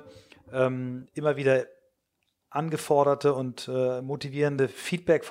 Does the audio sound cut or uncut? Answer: uncut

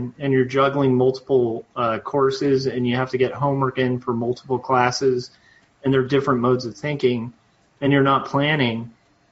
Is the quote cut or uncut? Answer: uncut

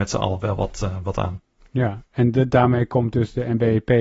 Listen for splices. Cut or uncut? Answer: uncut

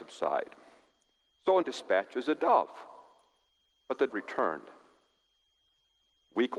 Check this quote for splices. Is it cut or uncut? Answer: cut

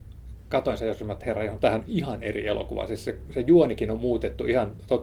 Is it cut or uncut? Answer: uncut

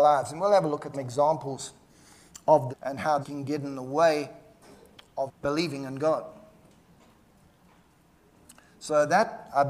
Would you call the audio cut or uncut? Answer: cut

